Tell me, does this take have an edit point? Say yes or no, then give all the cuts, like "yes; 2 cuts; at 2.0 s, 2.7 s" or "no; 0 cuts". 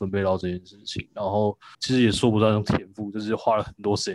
yes; 1 cut; at 1.7 s